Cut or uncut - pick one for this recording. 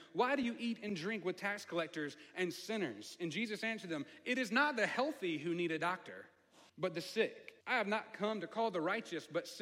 cut